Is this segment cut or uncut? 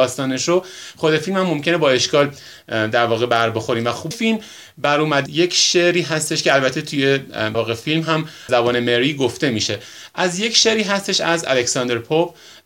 cut